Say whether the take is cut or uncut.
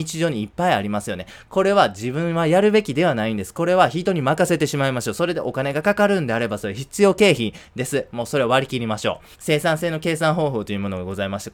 cut